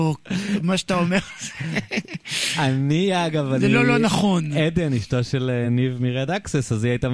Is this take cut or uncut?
uncut